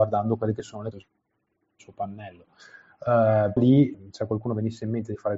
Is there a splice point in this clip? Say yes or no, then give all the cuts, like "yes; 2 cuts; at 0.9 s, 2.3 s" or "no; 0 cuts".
yes; 3 cuts; at 0.9 s, 3.6 s, 3.9 s